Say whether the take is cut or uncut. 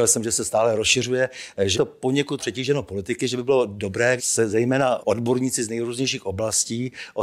cut